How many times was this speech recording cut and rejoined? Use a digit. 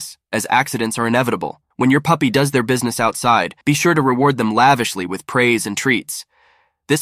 2